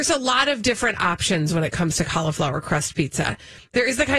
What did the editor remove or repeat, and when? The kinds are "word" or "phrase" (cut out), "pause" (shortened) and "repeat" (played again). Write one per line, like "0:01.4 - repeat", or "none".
none